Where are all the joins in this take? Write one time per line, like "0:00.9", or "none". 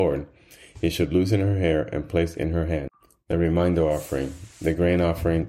none